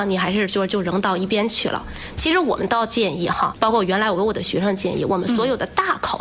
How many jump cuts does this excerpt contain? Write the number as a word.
one